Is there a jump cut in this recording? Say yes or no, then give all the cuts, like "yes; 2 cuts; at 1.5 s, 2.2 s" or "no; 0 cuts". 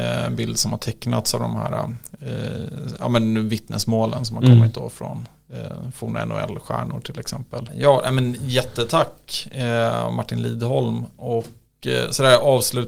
no; 0 cuts